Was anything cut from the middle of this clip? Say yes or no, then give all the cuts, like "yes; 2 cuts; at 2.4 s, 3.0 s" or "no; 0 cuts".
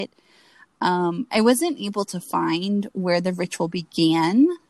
no; 0 cuts